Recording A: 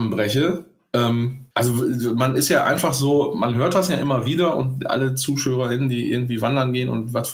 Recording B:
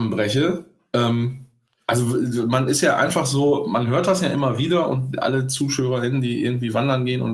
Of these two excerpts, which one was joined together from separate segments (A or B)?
A